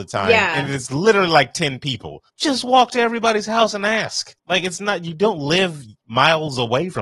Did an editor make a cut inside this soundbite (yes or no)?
yes